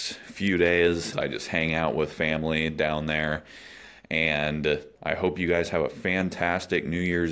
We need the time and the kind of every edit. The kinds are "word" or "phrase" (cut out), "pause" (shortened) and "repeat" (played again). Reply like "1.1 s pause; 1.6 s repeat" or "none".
1.1 s word; 4.9 s pause